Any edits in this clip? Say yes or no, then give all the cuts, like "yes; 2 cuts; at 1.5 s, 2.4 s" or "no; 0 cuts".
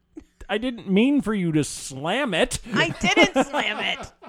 no; 0 cuts